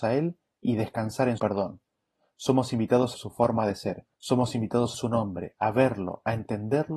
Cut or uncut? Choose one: cut